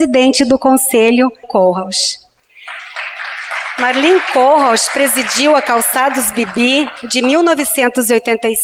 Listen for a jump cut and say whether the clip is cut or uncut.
cut